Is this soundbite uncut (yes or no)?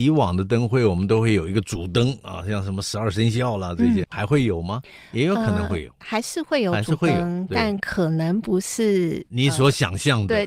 no